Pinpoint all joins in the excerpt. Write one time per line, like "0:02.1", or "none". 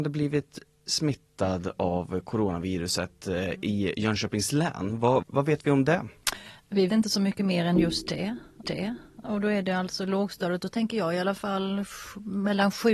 0:05.2
0:06.9
0:08.6